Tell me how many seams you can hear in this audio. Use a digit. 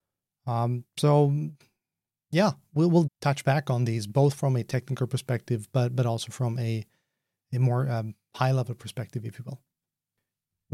1